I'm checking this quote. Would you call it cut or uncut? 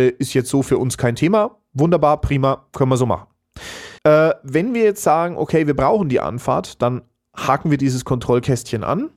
cut